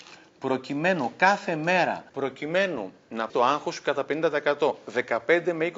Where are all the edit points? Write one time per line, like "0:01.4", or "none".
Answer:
0:02.1
0:03.3